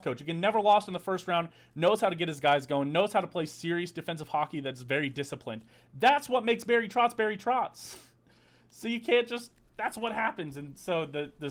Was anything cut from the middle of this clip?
no; 0 cuts

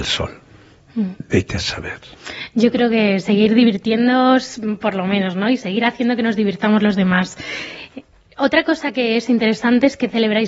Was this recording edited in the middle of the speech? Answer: no; 0 cuts

